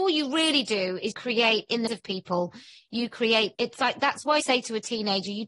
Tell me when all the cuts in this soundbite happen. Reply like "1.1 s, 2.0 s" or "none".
1.1 s, 1.9 s, 3.5 s, 4.4 s